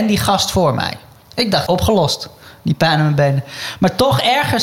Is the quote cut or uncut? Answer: cut